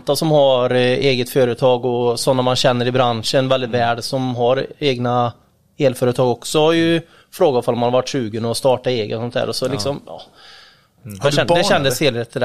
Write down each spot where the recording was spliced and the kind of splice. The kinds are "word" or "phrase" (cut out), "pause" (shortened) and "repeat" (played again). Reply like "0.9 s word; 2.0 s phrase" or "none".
none